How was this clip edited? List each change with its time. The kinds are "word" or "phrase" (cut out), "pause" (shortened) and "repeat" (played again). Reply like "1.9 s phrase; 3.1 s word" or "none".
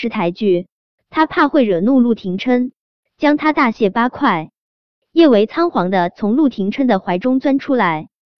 none

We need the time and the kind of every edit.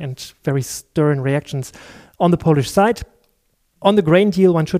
none

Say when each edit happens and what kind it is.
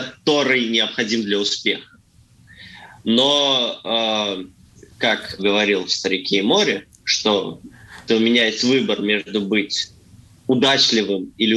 5.4 s word; 8.1 s word

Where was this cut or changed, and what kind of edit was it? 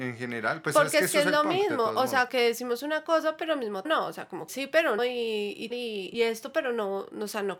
2.3 s word; 3.8 s word; 4.5 s word; 5.0 s word; 5.7 s word; 6.1 s word

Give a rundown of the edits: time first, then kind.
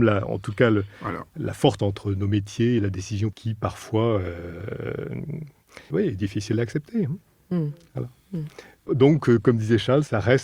1.8 s word; 3.3 s word; 5.9 s word

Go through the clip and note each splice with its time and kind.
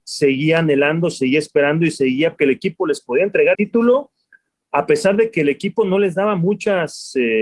2.4 s word; 3.5 s word

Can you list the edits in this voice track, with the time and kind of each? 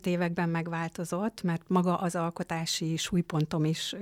none

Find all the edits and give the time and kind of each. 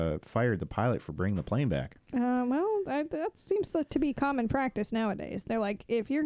none

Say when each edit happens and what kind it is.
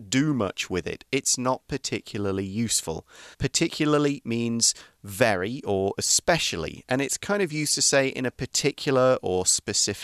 3.3 s pause

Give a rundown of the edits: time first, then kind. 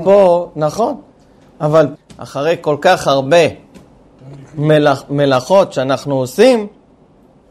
2.0 s word

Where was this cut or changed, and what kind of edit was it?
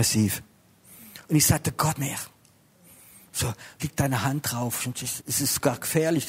1.2 s pause; 2.0 s word; 3.8 s word; 5.2 s word

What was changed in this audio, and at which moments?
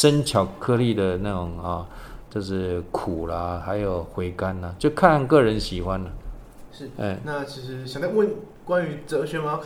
none

